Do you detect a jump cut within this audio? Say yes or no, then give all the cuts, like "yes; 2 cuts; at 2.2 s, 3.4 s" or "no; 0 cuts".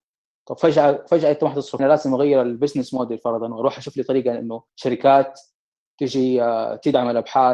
yes; 2 cuts; at 1.8 s, 4.7 s